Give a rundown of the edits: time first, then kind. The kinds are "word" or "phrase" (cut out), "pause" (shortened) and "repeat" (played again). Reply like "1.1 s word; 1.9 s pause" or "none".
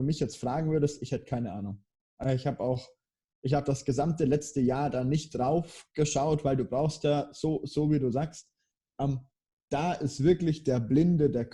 none